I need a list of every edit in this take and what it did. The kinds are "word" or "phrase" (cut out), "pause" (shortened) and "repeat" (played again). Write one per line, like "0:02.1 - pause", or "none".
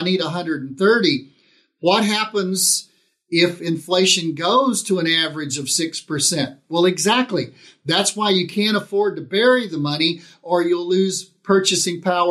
none